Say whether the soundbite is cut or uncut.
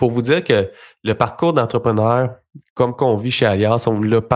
uncut